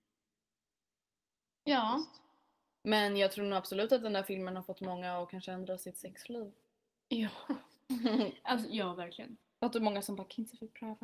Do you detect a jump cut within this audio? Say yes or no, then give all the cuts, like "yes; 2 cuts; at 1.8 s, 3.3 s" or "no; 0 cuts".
no; 0 cuts